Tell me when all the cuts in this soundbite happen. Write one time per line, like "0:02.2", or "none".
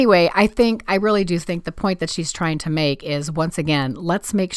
none